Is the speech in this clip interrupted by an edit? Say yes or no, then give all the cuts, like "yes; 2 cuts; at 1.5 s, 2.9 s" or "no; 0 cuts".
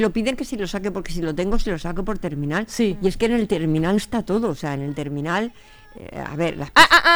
yes; 1 cut; at 4.0 s